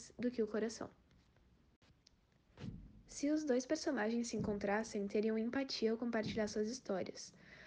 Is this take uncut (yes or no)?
yes